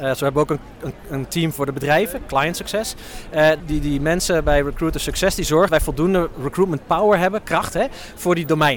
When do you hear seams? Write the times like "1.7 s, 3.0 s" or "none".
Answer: 3.6 s, 5.7 s

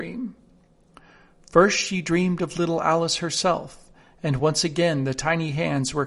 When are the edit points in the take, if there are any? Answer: none

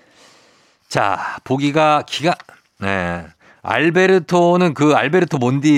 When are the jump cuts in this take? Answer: none

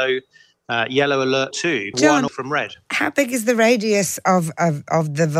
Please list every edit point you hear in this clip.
1.5 s, 1.9 s, 2.3 s

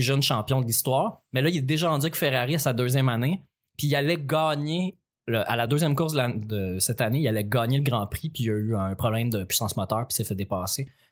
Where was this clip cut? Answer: none

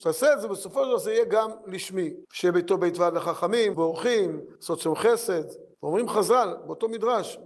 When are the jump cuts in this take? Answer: 2.2 s, 3.7 s, 4.6 s, 5.7 s

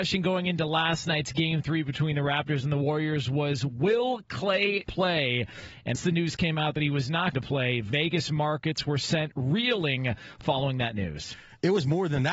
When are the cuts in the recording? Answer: 4.9 s, 6.0 s, 7.3 s

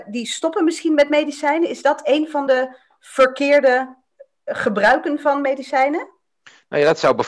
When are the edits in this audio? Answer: none

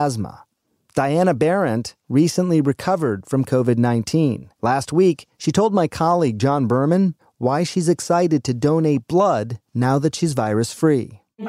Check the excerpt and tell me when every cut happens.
4.6 s, 9.7 s

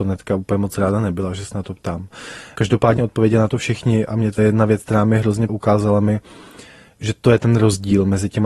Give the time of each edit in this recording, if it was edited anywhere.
3.0 s, 4.4 s, 5.5 s

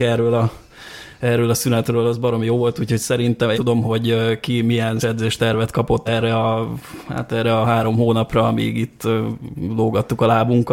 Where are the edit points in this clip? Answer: 3.5 s, 5.0 s, 6.1 s

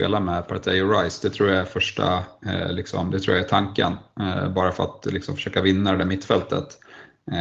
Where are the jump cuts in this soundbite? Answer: none

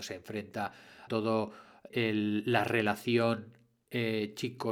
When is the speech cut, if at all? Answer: 1.1 s, 1.9 s

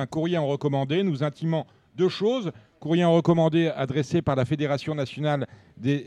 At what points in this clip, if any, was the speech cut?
none

